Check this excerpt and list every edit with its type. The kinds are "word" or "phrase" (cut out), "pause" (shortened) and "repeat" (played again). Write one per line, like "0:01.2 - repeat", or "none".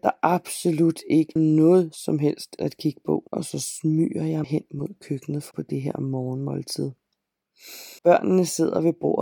0:01.4 - word
0:02.6 - word
0:03.3 - pause
0:04.4 - word
0:05.5 - phrase
0:08.0 - pause

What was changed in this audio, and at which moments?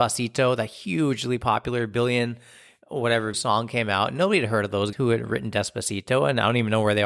0:03.3 - word
0:04.9 - word

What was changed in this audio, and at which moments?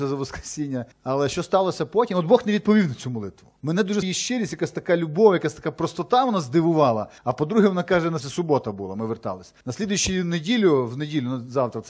0:00.9 - pause
0:03.6 - pause
0:04.0 - word
0:07.2 - pause
0:08.2 - phrase
0:09.6 - pause

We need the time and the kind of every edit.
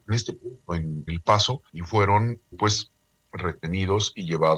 0:01.1 - word
0:01.7 - pause
0:02.5 - word

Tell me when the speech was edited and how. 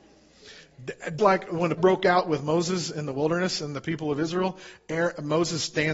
0:01.2 - word
0:01.8 - word

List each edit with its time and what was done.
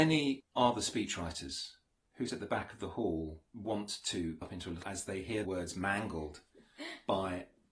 0:02.3 - word
0:03.5 - word
0:04.4 - word
0:04.8 - word
0:05.4 - word

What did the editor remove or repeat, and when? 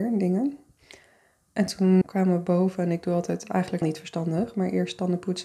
0:02.0 - word
0:03.8 - word

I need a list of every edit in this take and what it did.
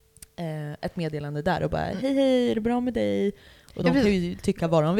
none

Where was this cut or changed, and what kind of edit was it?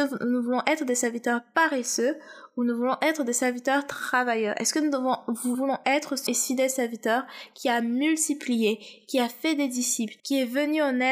0:05.5 - word
0:06.3 - word
0:10.2 - pause

